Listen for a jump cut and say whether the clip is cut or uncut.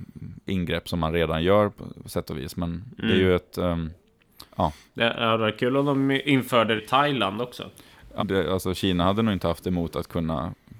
cut